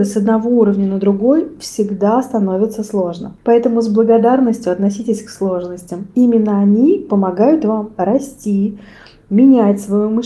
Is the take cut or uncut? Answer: cut